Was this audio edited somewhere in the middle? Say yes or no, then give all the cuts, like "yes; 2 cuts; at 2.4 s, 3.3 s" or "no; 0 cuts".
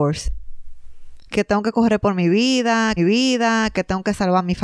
yes; 1 cut; at 3.0 s